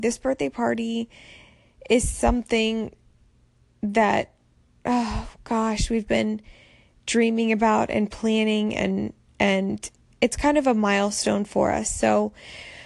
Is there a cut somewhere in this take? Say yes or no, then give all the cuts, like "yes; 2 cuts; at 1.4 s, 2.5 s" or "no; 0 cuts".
yes; 1 cut; at 6.1 s